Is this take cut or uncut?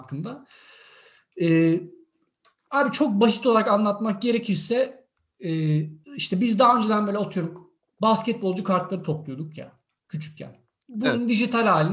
cut